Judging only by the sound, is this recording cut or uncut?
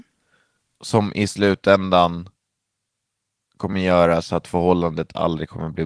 uncut